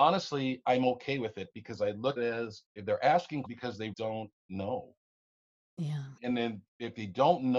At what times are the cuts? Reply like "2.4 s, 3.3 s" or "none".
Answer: 2.2 s, 2.7 s, 3.5 s, 3.9 s, 6.2 s